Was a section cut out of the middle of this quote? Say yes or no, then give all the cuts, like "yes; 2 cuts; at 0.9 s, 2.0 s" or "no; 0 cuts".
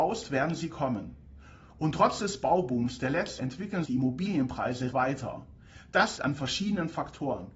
yes; 4 cuts; at 3.4 s, 3.8 s, 4.9 s, 6.2 s